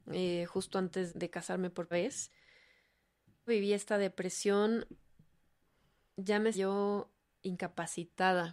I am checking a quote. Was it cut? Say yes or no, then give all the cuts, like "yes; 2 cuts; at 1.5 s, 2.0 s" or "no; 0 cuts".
yes; 4 cuts; at 1.1 s, 1.9 s, 3.5 s, 6.5 s